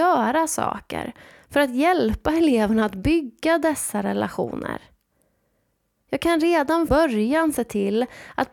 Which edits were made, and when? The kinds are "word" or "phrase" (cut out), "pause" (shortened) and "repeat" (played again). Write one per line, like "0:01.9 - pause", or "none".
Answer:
0:06.9 - word